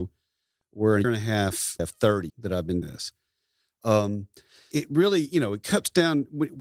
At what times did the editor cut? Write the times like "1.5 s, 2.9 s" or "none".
1.0 s, 1.8 s, 2.3 s, 2.8 s, 4.7 s